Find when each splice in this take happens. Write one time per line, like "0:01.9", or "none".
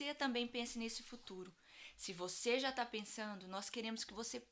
none